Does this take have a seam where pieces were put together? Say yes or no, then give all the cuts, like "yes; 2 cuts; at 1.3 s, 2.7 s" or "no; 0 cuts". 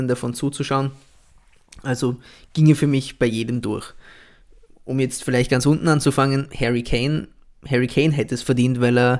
no; 0 cuts